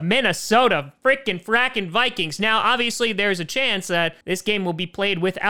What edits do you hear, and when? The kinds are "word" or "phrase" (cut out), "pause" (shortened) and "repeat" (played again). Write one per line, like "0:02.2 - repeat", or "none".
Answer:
0:04.2 - pause